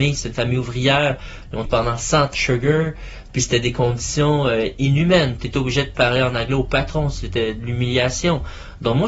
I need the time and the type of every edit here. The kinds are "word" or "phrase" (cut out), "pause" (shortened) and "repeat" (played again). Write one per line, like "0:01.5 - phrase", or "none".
0:01.7 - word
0:02.3 - phrase